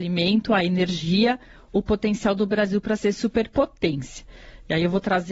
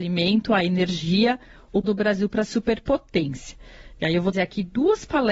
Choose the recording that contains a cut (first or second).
second